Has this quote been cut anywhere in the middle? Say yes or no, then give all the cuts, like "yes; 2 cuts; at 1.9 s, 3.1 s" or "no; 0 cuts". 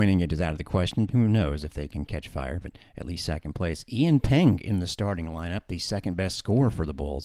yes; 1 cut; at 1.1 s